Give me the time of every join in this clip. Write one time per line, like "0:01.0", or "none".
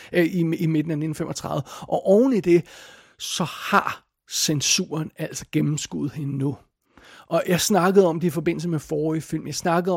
none